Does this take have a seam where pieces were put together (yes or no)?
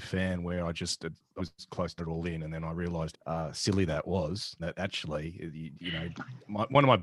yes